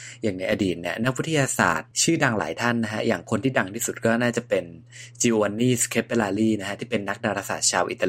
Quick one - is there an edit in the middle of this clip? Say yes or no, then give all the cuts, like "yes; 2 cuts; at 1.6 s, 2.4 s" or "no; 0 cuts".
no; 0 cuts